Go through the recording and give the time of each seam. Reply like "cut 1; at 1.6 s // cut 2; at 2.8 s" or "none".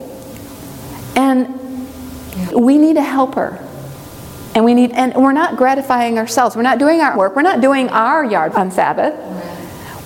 cut 1; at 2.5 s // cut 2; at 4.9 s // cut 3; at 7.1 s // cut 4; at 8.5 s